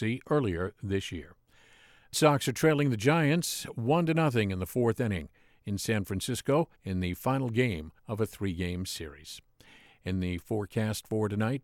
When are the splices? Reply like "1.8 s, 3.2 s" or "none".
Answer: 2.1 s, 6.8 s, 8.0 s